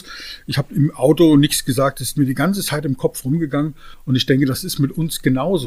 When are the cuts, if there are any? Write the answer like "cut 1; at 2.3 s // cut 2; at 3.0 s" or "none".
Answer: none